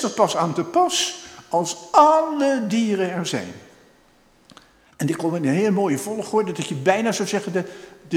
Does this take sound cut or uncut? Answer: uncut